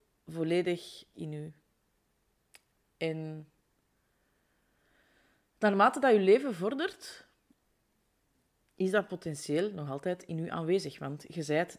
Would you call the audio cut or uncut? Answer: cut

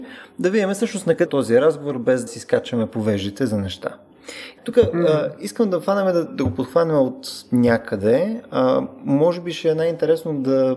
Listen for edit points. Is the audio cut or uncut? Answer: cut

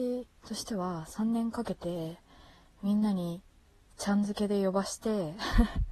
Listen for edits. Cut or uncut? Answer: uncut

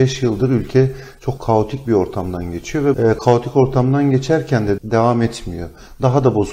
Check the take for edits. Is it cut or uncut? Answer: cut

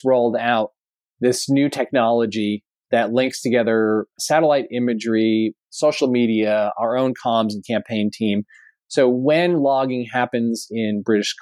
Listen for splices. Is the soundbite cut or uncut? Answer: uncut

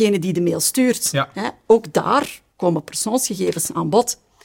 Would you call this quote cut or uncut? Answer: cut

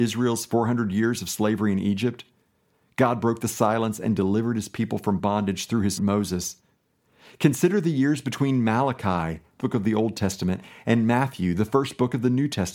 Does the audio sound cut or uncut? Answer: cut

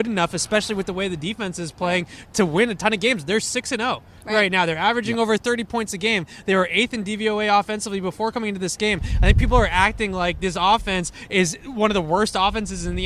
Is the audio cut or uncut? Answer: uncut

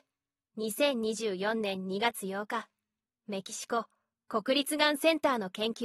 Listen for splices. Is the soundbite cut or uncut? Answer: uncut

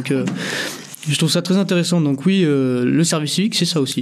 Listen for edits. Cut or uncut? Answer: uncut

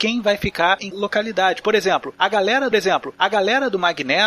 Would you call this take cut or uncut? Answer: cut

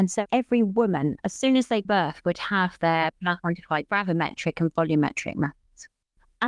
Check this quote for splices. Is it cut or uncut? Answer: cut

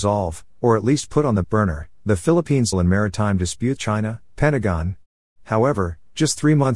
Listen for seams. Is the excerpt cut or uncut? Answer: cut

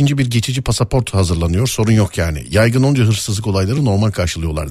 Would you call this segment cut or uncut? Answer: uncut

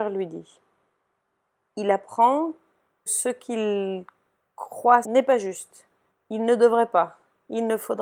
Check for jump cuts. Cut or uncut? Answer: cut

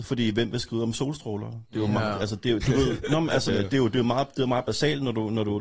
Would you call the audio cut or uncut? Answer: cut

